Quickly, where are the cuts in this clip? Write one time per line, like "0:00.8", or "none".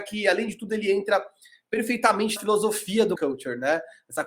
0:02.4
0:03.1

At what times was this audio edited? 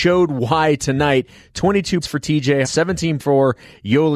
0:02.0
0:02.6
0:03.2

